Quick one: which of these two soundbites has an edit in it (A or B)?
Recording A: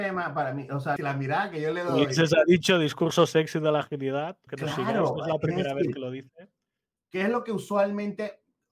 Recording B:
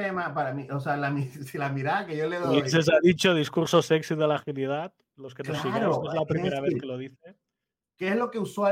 A